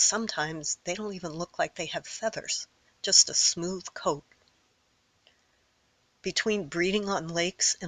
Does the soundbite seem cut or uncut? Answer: uncut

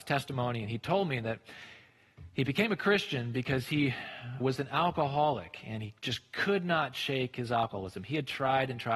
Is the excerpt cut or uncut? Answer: cut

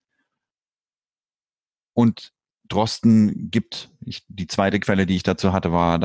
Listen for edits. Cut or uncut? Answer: uncut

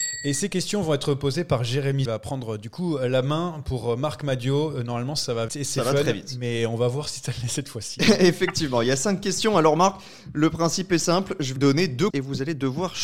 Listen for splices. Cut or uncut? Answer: cut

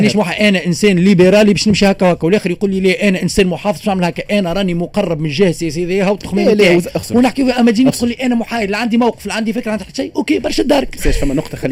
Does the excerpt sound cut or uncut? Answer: uncut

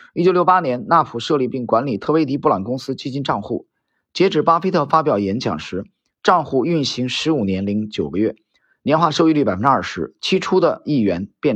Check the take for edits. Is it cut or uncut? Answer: uncut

